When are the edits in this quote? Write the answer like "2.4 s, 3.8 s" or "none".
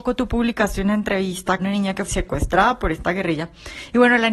1.6 s, 2.1 s